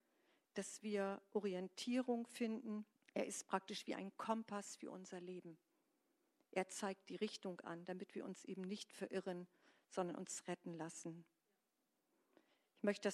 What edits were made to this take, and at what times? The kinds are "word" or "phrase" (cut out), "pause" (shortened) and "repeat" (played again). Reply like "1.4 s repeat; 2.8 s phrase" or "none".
2.9 s pause